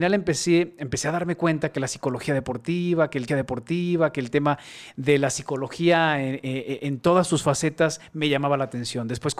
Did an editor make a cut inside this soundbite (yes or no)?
yes